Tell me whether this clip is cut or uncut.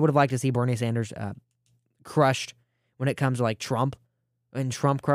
uncut